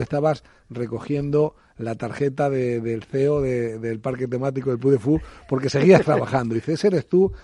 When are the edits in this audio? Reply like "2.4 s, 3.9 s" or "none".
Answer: none